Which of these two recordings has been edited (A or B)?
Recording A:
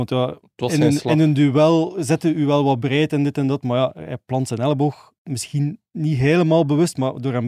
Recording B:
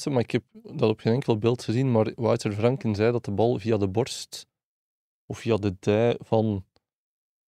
A